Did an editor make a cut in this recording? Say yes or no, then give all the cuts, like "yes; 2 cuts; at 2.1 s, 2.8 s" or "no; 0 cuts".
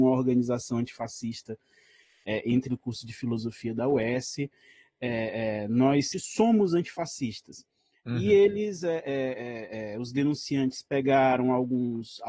yes; 2 cuts; at 2.7 s, 6.1 s